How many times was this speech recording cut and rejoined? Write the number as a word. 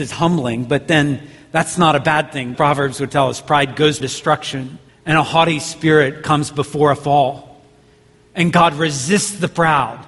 three